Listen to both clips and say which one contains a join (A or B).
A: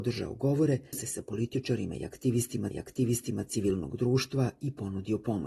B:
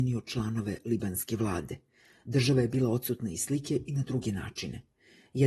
A